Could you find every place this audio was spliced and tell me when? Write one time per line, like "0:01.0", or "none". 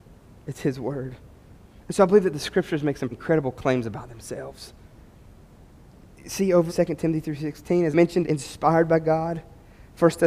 0:03.1
0:06.7
0:07.9
0:08.2